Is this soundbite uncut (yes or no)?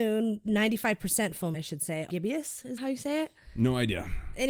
no